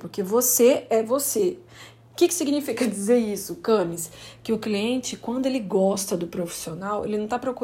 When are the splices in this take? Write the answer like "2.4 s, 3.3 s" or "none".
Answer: none